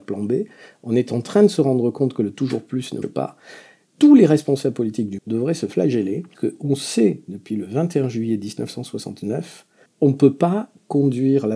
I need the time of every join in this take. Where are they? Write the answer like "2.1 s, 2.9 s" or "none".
3.0 s, 5.2 s, 6.3 s, 9.9 s